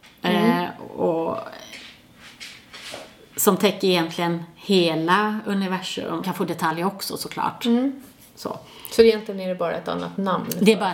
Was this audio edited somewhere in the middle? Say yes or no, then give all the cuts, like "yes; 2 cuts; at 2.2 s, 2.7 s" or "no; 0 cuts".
yes; 1 cut; at 6.2 s